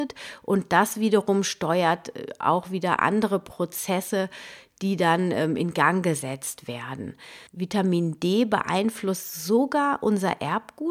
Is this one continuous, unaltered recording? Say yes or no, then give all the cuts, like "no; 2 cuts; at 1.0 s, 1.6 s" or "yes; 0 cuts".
no; 1 cut; at 7.5 s